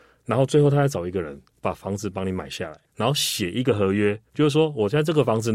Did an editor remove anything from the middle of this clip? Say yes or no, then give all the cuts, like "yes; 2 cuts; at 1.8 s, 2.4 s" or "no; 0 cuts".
yes; 2 cuts; at 2.9 s, 4.3 s